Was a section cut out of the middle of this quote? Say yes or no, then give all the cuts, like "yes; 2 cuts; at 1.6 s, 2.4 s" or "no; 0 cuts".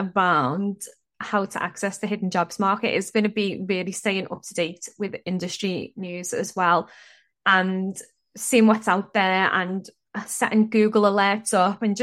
no; 0 cuts